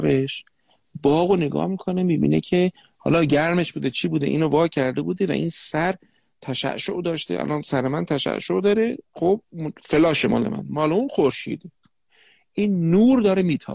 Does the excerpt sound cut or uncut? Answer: uncut